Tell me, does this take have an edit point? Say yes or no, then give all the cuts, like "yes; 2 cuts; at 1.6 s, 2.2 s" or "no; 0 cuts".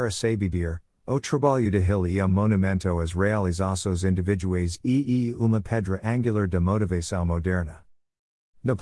no; 0 cuts